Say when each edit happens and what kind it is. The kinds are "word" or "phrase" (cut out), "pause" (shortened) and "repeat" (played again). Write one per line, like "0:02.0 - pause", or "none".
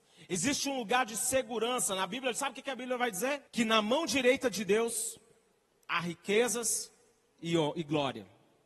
0:03.5 - pause